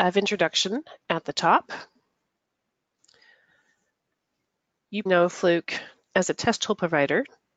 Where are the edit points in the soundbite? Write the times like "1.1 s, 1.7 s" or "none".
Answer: 5.1 s